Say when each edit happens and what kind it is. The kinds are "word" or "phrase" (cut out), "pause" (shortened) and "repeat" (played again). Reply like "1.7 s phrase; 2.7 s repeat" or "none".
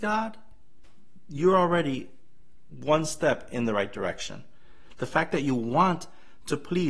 none